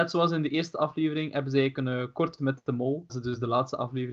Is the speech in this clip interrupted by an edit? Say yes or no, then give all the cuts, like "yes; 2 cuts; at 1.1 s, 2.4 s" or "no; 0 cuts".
yes; 2 cuts; at 2.4 s, 3.1 s